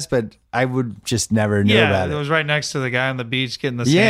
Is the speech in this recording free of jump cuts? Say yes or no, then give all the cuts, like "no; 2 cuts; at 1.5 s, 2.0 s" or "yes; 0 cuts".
yes; 0 cuts